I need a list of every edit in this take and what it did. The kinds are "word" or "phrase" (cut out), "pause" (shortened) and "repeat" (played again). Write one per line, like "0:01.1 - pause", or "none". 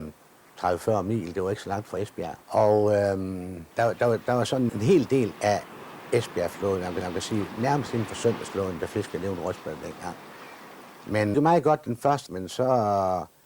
0:02.4 - pause
0:03.7 - pause
0:04.7 - word
0:07.0 - repeat
0:11.3 - phrase
0:12.3 - word

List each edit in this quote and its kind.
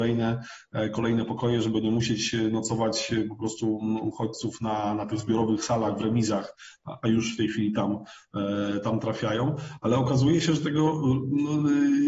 none

